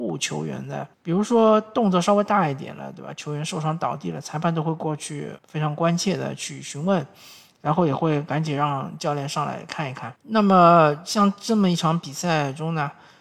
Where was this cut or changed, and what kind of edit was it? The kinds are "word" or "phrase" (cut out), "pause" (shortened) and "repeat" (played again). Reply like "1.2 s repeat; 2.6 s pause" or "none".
0.9 s pause; 5.4 s word; 10.2 s pause